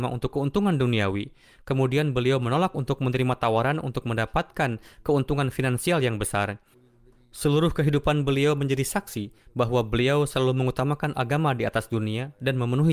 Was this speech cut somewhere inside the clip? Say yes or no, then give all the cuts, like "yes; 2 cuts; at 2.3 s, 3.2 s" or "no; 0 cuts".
no; 0 cuts